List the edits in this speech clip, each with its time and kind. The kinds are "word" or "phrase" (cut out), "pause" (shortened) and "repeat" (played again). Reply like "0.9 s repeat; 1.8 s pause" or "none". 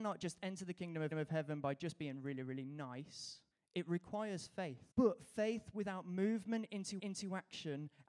1.1 s repeat; 3.5 s pause; 4.9 s pause; 7.0 s repeat